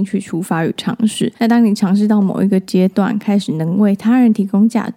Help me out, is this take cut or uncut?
cut